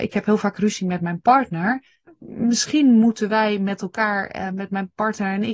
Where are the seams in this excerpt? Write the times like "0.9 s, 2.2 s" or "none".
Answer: 2.1 s